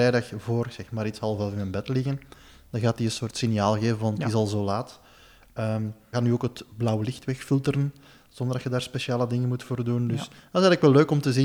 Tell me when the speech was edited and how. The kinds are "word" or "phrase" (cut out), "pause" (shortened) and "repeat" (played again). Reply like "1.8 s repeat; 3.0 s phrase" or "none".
6.1 s word